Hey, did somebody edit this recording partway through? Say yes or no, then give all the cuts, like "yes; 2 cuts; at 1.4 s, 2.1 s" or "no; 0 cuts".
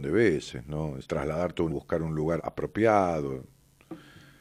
yes; 3 cuts; at 1.0 s, 1.7 s, 2.4 s